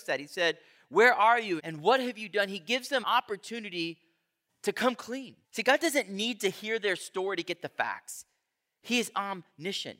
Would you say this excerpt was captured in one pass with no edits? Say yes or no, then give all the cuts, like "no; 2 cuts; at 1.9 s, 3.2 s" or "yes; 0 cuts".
no; 3 cuts; at 1.6 s, 3.0 s, 5.4 s